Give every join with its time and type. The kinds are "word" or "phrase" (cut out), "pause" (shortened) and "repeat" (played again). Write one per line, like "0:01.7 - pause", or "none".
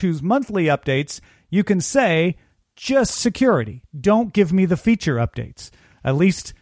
none